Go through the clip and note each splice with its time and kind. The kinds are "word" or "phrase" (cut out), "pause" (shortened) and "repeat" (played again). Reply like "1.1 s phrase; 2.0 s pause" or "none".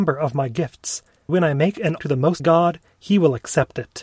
1.3 s word; 2.0 s word; 2.4 s word